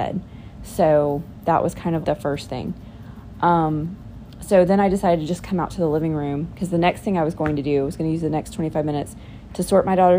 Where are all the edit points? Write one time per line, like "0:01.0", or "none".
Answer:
0:02.0